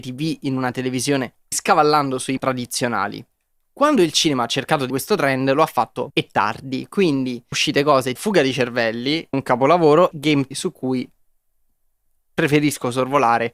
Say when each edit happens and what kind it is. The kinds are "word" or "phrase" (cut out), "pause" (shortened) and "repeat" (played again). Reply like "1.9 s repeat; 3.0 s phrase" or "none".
1.5 s word; 2.4 s word; 4.9 s word; 6.1 s word; 7.5 s word; 8.2 s word; 9.3 s word; 10.1 s word; 10.5 s word